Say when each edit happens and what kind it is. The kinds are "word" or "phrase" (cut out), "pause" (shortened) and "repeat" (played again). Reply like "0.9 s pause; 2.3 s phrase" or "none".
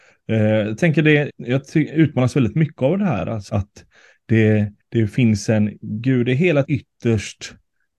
1.3 s word; 3.5 s word; 4.8 s pause; 6.6 s word